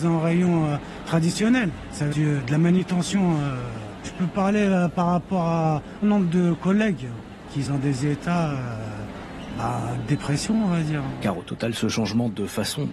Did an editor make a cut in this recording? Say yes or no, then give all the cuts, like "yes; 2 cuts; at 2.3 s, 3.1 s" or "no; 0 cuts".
yes; 3 cuts; at 2.1 s, 6.0 s, 7.7 s